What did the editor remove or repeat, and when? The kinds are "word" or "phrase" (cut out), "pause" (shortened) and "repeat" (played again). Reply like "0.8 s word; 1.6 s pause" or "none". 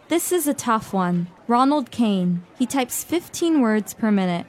1.4 s pause; 2.5 s pause